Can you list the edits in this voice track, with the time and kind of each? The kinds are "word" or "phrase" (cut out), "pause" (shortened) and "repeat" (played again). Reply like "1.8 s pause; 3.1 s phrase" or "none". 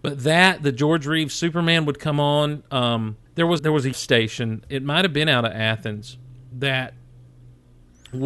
3.3 s pause; 3.6 s word; 3.9 s word